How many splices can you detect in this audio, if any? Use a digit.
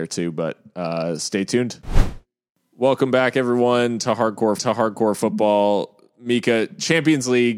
1